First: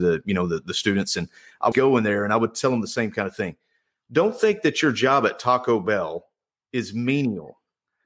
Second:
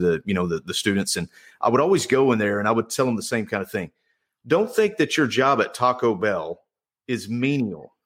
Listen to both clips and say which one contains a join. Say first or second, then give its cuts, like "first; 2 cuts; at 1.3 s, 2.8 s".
first; 1 cut; at 1.7 s